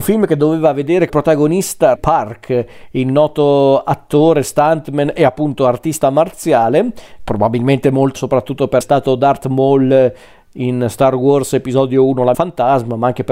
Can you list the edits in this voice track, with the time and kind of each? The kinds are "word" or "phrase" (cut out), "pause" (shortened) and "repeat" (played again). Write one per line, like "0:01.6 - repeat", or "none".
0:01.1 - word
0:02.0 - word
0:07.2 - word
0:08.2 - word
0:08.8 - word
0:12.3 - word